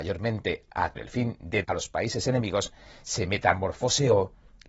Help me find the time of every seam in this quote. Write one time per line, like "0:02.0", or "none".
0:01.0
0:01.6